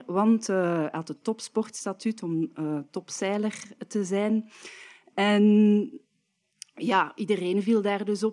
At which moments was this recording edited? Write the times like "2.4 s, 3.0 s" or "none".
none